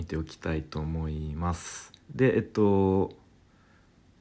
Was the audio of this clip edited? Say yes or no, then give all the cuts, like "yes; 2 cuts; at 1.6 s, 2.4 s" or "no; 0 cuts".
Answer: yes; 1 cut; at 2.0 s